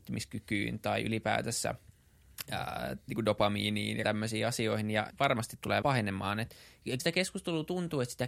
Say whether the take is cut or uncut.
cut